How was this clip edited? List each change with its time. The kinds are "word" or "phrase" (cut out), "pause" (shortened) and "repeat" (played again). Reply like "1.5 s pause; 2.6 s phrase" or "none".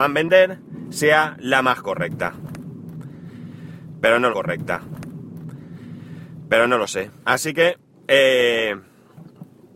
4.3 s repeat; 7.2 s pause; 7.9 s pause